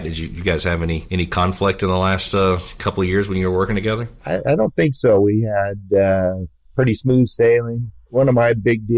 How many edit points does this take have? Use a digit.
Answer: 0